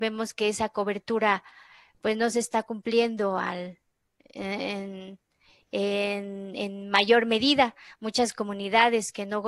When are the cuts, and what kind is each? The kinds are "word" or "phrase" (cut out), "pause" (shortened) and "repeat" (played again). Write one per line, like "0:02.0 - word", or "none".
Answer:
none